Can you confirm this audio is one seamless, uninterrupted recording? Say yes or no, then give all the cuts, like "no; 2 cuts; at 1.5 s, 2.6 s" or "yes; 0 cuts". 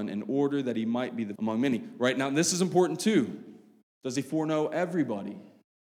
no; 1 cut; at 1.4 s